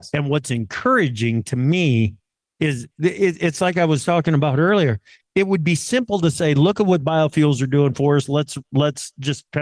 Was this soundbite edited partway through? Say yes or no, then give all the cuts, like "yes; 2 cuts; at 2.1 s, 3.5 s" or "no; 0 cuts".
no; 0 cuts